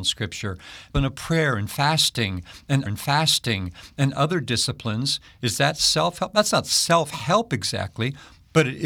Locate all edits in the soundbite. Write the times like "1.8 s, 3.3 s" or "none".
0.9 s, 2.9 s